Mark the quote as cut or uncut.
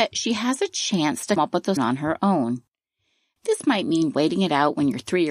cut